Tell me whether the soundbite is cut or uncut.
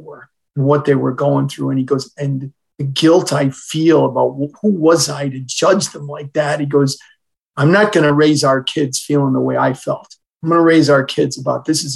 uncut